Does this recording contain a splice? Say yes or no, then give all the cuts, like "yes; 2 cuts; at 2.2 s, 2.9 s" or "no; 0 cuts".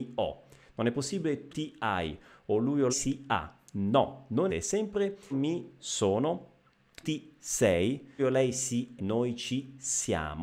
yes; 7 cuts; at 1.5 s, 2.9 s, 4.5 s, 5.3 s, 7.0 s, 8.2 s, 9.0 s